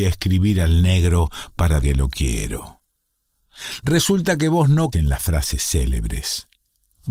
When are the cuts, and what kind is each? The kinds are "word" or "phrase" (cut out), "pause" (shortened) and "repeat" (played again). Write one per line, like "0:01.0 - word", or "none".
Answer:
0:01.8 - word
0:04.9 - word